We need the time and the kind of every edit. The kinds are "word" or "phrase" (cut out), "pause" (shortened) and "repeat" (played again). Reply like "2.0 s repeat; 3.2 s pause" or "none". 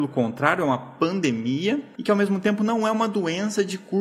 none

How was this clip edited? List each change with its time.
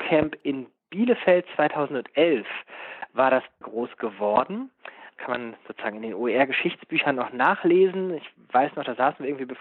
3.6 s word; 5.2 s word

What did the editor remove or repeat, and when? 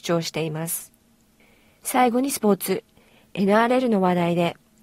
none

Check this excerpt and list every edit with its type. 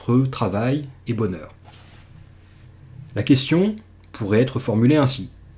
1.1 s word

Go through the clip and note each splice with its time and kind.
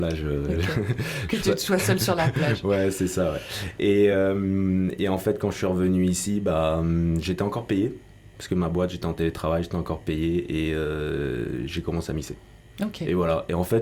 none

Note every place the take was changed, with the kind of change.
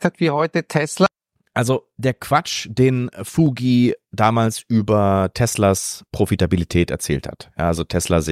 none

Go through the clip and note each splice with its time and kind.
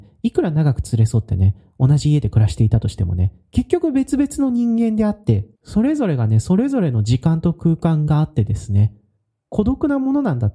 5.5 s pause

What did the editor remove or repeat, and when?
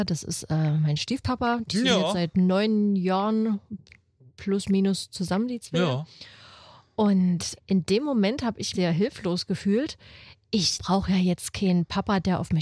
7.6 s word; 8.7 s word; 10.7 s word

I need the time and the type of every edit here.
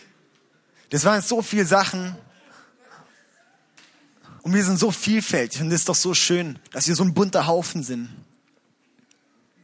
4.4 s pause; 6.6 s pause

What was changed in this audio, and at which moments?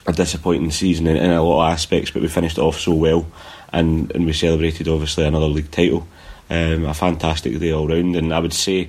none

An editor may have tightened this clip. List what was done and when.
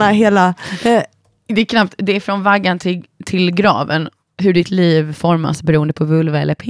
none

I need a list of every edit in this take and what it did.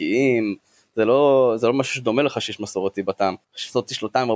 3.4 s pause

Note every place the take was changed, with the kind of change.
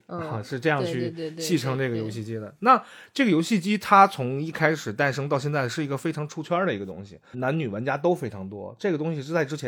7.3 s word

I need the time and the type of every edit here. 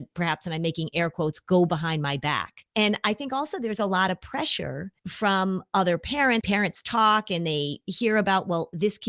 5.0 s pause; 6.4 s word

